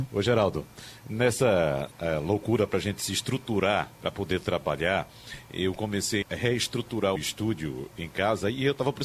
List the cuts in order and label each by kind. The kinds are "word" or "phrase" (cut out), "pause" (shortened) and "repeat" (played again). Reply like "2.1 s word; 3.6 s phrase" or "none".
1.9 s word; 3.9 s pause; 6.2 s phrase; 7.2 s phrase